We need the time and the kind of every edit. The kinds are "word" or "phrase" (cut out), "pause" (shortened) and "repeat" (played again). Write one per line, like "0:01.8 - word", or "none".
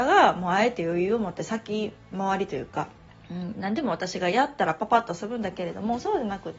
0:03.1 - pause